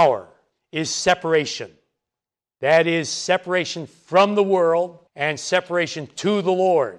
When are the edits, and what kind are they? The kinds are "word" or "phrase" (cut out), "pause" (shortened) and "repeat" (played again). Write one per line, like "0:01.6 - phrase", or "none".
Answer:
0:05.1 - pause